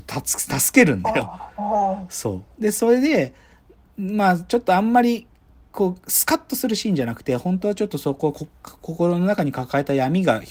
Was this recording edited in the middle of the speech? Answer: no; 0 cuts

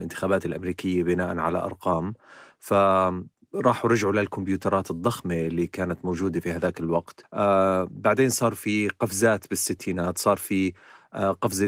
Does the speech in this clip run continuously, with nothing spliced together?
yes; 0 cuts

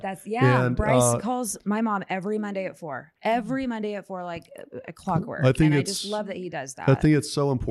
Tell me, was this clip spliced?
no; 0 cuts

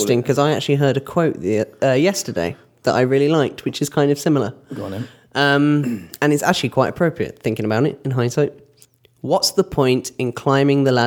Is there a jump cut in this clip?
no; 0 cuts

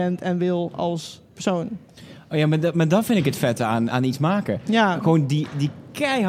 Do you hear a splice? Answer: yes; 2 cuts; at 1.2 s, 3.9 s

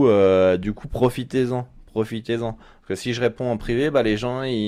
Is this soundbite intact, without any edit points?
yes; 0 cuts

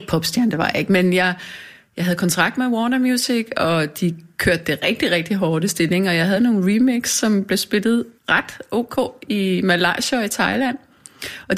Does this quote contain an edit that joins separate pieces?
yes; 1 cut; at 8.2 s

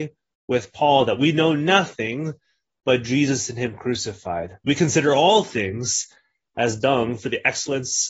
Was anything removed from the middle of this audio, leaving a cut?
no; 0 cuts

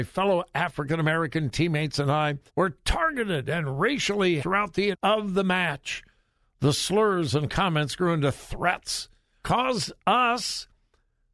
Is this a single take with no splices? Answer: no; 4 cuts; at 2.5 s, 4.4 s, 4.9 s, 9.4 s

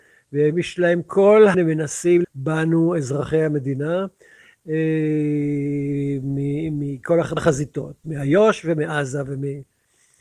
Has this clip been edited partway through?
yes; 3 cuts; at 1.5 s, 2.2 s, 7.4 s

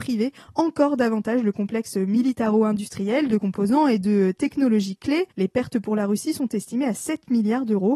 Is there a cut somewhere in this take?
yes; 1 cut; at 5.3 s

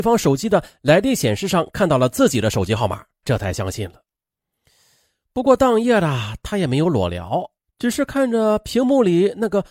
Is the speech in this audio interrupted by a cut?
yes; 1 cut; at 3.2 s

